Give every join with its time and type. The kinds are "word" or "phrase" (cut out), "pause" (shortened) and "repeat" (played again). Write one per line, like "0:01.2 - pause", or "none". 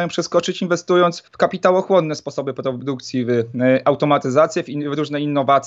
0:01.3 - pause